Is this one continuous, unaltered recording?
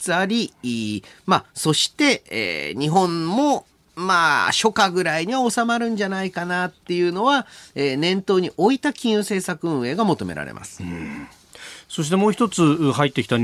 yes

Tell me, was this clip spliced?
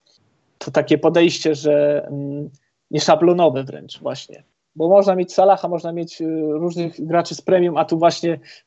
no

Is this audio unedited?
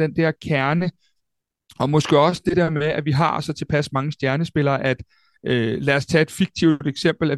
yes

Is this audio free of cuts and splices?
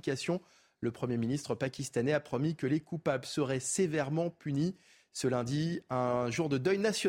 yes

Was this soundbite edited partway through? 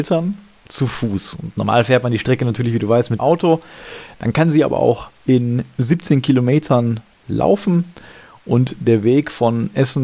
yes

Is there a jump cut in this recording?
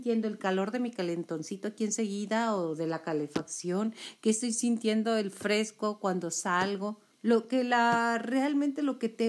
yes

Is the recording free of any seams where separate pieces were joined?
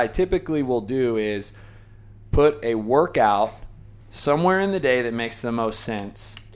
no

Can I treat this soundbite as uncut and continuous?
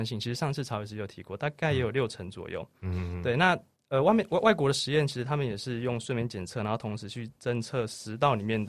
no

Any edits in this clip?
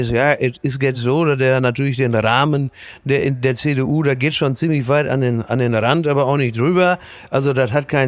no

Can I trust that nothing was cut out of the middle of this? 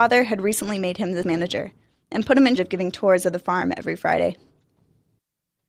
no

